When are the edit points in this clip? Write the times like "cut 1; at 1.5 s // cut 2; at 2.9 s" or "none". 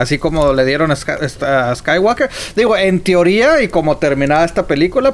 none